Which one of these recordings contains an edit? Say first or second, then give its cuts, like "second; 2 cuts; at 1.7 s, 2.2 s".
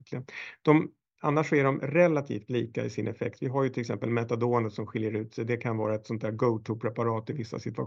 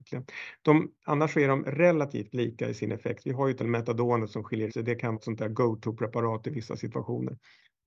second; 4 cuts; at 1.0 s, 3.6 s, 4.7 s, 5.1 s